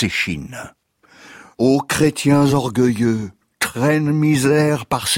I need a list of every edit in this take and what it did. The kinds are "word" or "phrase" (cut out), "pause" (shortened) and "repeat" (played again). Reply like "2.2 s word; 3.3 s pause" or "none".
none